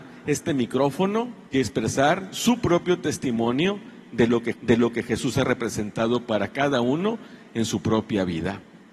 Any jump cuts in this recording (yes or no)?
yes